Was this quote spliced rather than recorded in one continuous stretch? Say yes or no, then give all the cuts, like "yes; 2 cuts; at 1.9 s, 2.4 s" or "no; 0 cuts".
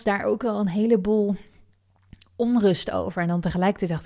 no; 0 cuts